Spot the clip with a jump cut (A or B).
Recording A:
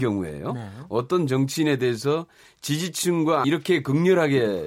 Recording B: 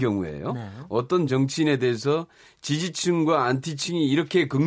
A